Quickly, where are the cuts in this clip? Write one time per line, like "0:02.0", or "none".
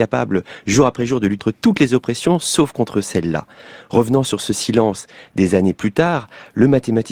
0:01.4